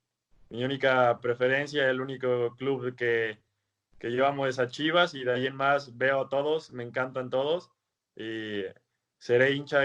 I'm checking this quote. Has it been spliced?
no; 0 cuts

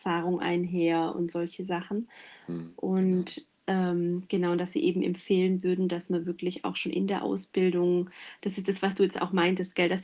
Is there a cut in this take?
no; 0 cuts

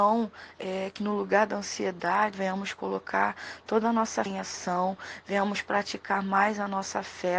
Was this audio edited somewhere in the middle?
yes; 3 cuts; at 1.0 s, 2.3 s, 4.3 s

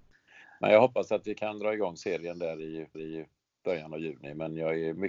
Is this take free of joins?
no; 1 cut; at 2.9 s

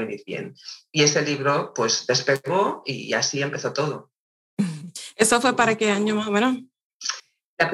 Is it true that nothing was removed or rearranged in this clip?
yes; 0 cuts

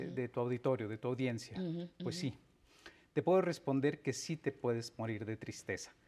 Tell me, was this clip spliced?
no; 0 cuts

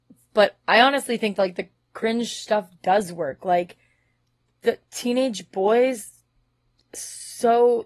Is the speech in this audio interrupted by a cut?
no; 0 cuts

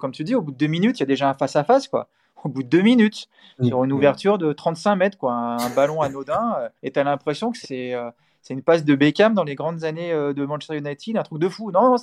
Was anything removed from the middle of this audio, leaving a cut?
yes; 2 cuts; at 6.8 s, 7.6 s

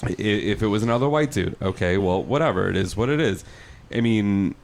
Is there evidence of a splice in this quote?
no; 0 cuts

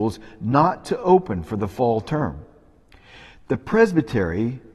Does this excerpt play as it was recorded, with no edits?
yes; 0 cuts

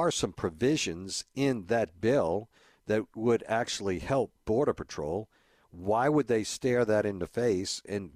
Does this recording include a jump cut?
no; 0 cuts

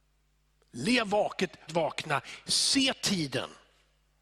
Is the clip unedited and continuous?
no; 1 cut; at 1.7 s

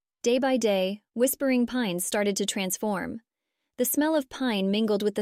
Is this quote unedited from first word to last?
yes; 0 cuts

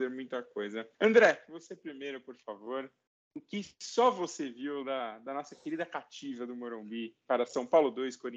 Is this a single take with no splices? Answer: no; 2 cuts; at 0.9 s, 3.1 s

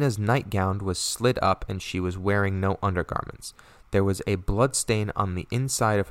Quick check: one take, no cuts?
yes; 0 cuts

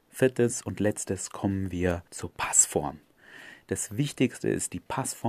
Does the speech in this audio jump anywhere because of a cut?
yes; 1 cut; at 2.1 s

